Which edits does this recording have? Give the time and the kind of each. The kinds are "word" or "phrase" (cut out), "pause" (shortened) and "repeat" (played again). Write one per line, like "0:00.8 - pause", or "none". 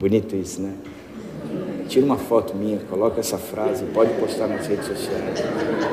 none